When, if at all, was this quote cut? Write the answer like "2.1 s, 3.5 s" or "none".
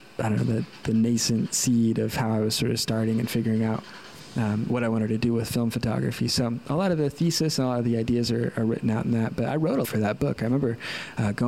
9.8 s